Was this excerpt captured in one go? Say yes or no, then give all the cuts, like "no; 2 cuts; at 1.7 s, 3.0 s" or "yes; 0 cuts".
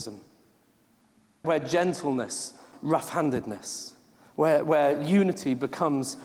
no; 2 cuts; at 1.4 s, 2.7 s